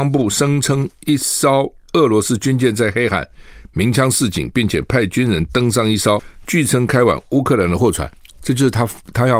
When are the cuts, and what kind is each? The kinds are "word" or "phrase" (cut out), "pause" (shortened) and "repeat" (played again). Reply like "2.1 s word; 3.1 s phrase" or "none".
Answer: none